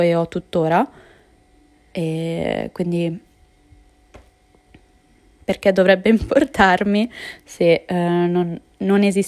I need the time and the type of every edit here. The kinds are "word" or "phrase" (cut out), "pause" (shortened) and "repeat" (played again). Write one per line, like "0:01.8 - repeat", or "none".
none